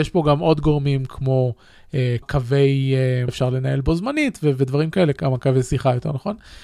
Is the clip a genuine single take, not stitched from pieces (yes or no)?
no